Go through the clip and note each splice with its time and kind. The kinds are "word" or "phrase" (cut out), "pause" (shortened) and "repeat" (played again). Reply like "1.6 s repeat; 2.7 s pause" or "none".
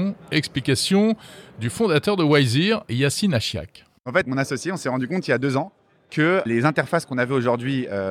4.2 s word; 6.5 s word